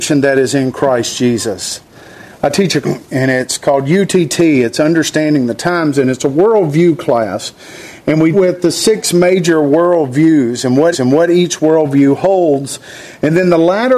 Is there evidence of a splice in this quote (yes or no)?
yes